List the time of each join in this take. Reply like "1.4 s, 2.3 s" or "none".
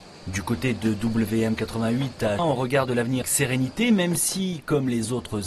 2.4 s, 3.2 s